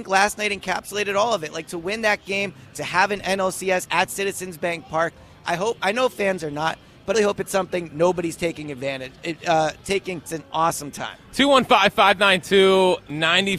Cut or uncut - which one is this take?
cut